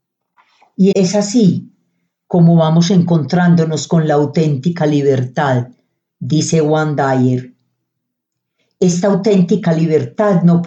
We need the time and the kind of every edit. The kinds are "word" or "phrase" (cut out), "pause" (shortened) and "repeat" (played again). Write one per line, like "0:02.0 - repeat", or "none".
0:00.9 - word

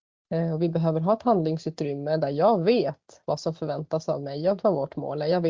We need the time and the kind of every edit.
0:04.6 - word

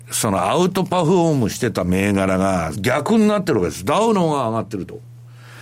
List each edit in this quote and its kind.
0:02.7 - phrase

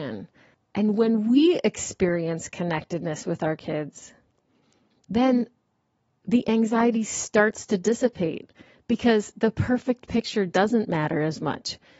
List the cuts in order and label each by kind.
none

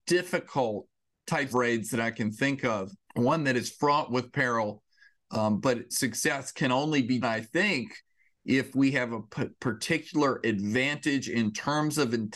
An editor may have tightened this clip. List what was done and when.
0:01.5 - word
0:03.0 - pause
0:05.9 - word
0:07.2 - word

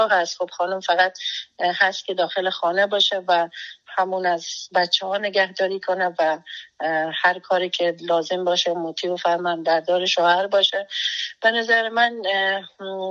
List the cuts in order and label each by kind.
none

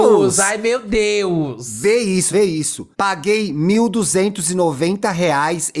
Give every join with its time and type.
0:02.3 - word
0:02.9 - pause

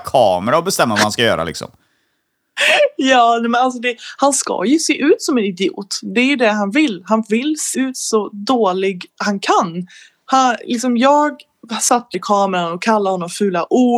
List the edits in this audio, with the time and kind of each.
0:07.7 - word
0:12.1 - word

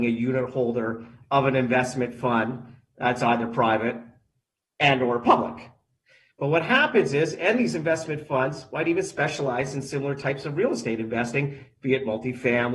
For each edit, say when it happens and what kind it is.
none

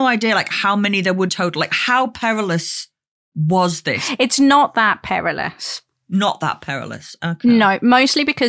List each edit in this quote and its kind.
0:01.3 - phrase

